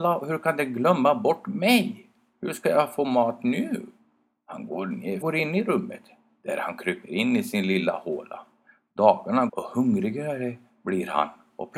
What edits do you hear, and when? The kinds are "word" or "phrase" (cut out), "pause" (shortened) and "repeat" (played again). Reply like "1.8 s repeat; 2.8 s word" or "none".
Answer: 5.2 s phrase; 9.5 s word

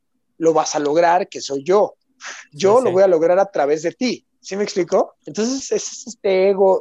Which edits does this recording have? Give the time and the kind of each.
2.5 s pause; 4.3 s pause; 5.2 s pause

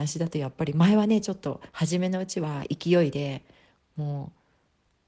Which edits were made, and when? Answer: none

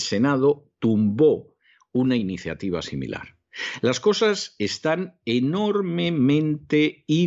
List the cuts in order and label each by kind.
none

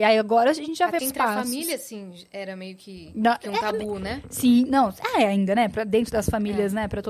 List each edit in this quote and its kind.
1.0 s phrase

